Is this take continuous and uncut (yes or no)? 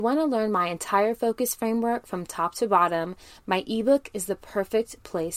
yes